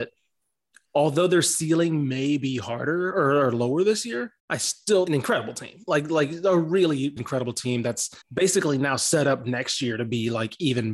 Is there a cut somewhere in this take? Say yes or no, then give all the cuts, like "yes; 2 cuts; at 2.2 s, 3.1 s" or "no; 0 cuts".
yes; 4 cuts; at 4.4 s, 5.1 s, 7.2 s, 8.2 s